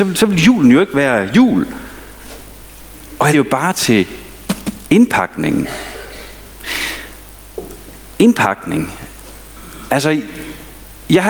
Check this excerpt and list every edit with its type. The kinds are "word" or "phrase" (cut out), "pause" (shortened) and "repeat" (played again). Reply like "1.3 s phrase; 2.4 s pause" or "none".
3.3 s phrase